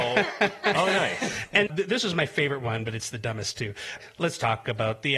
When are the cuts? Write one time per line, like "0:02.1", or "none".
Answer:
0:01.7